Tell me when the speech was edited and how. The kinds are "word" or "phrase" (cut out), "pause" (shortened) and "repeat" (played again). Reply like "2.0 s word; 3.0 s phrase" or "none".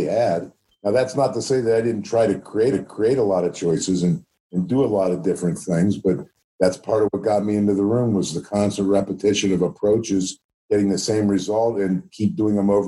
2.7 s repeat